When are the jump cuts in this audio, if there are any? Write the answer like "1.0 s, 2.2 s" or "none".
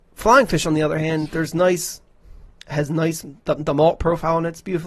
3.4 s